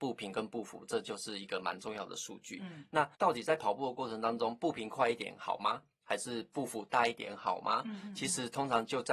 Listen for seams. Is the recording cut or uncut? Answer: cut